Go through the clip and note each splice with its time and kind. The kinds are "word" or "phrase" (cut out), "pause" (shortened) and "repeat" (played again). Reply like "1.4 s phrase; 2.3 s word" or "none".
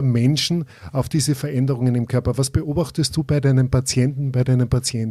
none